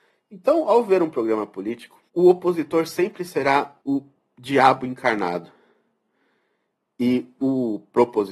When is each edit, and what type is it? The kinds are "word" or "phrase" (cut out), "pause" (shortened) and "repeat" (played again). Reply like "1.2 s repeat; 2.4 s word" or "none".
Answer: 2.1 s pause; 3.8 s pause